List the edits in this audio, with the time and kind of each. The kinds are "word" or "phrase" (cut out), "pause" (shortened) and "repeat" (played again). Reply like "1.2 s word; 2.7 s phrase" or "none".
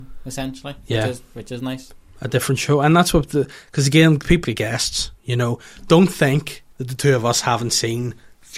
4.4 s word; 6.7 s pause